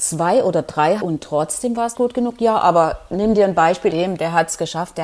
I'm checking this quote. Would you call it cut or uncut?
cut